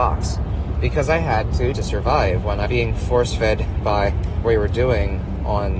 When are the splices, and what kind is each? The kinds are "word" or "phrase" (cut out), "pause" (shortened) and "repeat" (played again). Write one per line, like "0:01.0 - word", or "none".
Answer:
0:01.7 - word
0:02.6 - word
0:04.4 - word